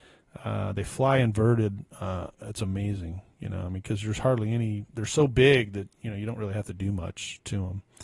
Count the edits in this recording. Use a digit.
1